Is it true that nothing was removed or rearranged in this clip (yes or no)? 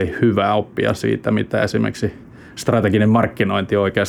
yes